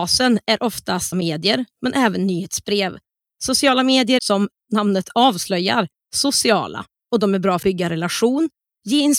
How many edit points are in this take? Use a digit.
3